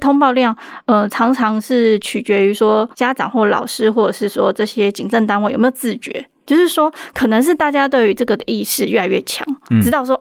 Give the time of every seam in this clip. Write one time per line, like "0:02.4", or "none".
0:02.9